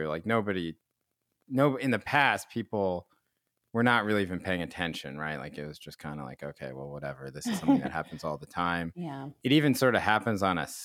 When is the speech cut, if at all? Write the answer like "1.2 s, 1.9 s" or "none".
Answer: none